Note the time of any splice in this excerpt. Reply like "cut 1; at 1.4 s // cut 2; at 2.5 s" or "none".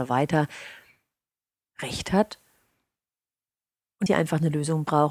cut 1; at 4.1 s